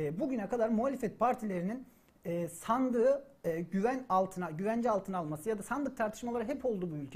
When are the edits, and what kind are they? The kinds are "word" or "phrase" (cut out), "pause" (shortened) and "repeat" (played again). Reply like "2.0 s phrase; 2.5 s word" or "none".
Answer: none